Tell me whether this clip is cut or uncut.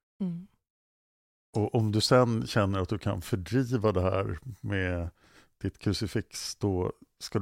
uncut